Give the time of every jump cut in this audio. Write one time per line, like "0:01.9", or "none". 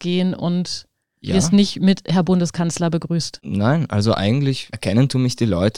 none